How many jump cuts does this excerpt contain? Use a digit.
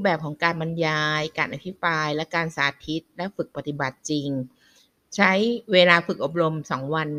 0